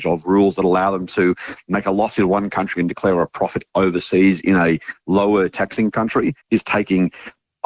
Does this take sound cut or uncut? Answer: cut